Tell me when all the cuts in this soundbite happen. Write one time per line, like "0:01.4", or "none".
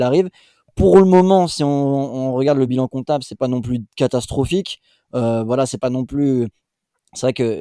none